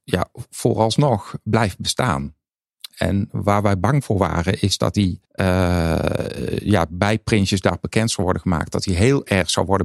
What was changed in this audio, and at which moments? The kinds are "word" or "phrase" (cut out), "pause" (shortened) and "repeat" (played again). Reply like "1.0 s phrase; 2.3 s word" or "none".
5.3 s pause